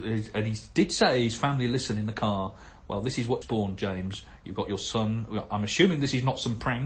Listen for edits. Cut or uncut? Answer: cut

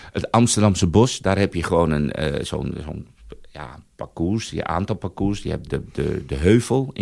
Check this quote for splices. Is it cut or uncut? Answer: cut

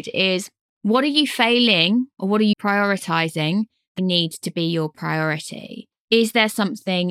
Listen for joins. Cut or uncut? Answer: cut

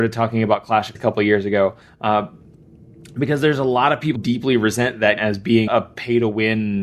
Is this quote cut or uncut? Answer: cut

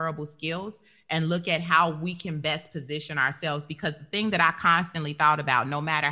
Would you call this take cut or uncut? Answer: uncut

